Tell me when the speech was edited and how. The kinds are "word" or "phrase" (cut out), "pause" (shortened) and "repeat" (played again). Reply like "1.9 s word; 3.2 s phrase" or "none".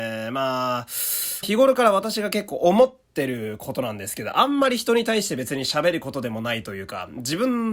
1.4 s phrase